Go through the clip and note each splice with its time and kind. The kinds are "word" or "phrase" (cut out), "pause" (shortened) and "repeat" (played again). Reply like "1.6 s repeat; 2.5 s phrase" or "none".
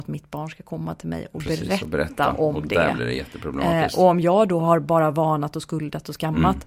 none